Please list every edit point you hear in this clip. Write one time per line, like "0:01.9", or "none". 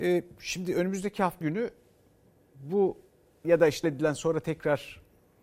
0:01.4
0:03.4
0:03.8